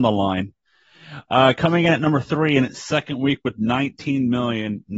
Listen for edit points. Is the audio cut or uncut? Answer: uncut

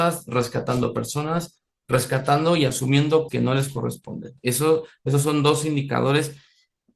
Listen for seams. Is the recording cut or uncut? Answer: cut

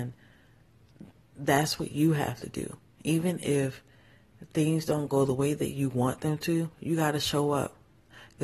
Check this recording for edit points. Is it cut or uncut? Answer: cut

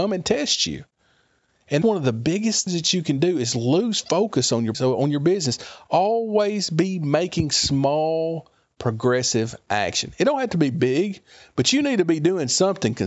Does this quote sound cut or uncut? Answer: cut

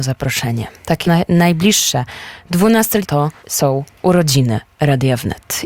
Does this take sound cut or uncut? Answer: cut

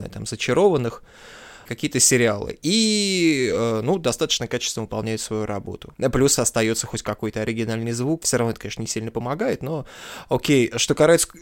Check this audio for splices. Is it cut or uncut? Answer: uncut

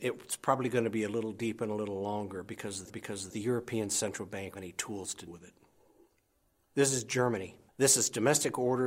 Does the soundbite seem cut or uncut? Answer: cut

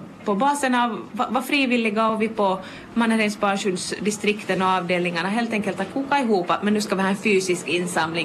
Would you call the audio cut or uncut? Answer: uncut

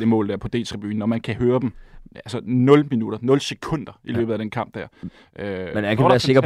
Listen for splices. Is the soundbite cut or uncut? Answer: uncut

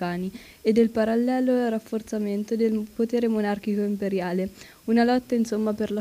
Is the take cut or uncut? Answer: uncut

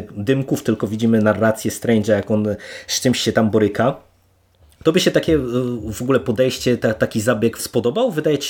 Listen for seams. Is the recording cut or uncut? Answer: cut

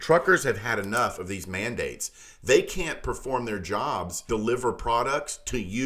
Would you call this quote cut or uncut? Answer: cut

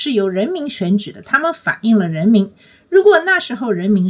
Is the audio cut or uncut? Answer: uncut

